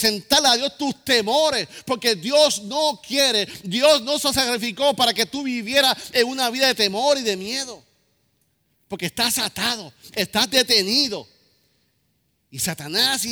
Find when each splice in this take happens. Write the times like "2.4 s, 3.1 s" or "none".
none